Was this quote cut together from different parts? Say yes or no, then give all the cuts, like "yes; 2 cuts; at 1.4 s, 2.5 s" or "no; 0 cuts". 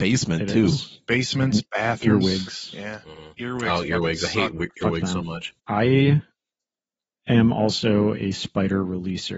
yes; 1 cut; at 5.6 s